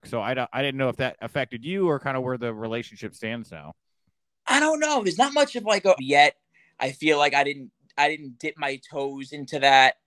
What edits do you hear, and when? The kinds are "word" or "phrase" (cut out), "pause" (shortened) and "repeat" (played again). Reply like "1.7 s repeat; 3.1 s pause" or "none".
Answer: 6.0 s phrase